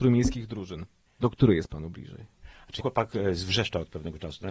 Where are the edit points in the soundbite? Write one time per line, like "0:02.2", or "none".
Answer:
0:02.8